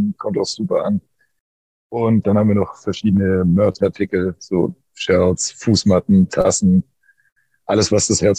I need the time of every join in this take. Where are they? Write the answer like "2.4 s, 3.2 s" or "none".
none

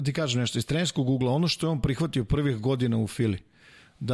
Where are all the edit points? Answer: none

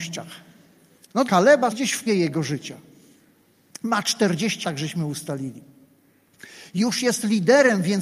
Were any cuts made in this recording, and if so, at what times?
1.3 s, 1.7 s, 2.1 s, 4.6 s

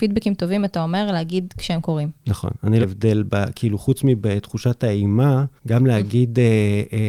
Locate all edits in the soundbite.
2.8 s, 5.6 s

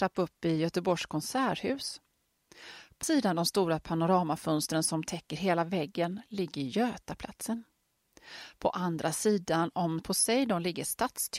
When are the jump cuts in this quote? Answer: 3.0 s, 10.0 s

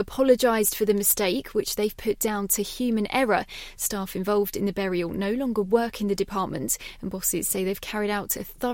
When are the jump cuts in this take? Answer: none

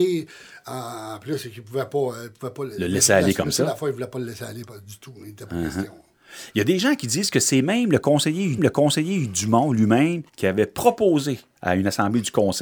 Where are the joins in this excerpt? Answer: 2.7 s, 8.6 s, 10.3 s

